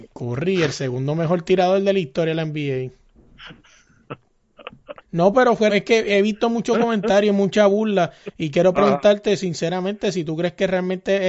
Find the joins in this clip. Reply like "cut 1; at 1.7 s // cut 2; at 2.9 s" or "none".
cut 1; at 5.0 s // cut 2; at 5.7 s